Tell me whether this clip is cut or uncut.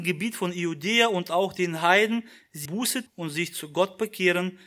cut